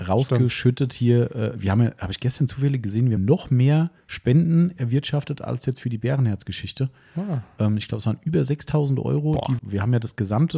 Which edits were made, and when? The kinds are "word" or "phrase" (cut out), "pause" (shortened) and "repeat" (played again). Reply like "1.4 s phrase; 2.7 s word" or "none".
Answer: 3.2 s word; 9.6 s word